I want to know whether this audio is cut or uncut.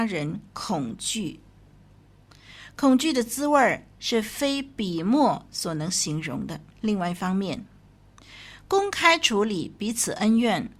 cut